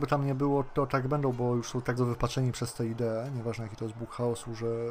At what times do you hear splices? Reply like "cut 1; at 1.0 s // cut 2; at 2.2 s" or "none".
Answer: cut 1; at 2.0 s

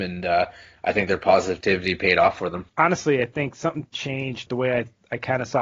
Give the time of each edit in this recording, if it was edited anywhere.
cut 1; at 3.9 s

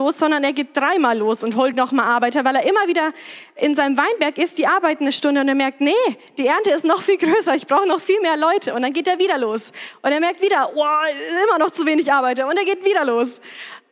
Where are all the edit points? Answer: none

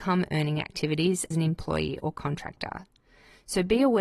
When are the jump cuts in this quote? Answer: cut 1; at 1.3 s

